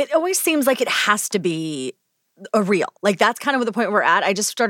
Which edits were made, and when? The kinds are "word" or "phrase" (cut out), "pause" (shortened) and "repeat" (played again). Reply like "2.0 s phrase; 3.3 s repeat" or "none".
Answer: 3.0 s pause